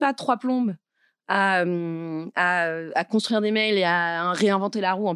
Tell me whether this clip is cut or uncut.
uncut